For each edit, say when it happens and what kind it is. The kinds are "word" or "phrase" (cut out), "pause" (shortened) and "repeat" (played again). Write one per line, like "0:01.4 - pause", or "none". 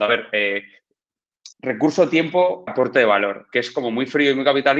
0:01.5 - pause
0:02.7 - word